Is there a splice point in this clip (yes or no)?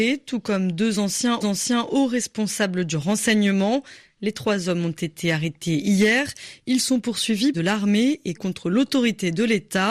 yes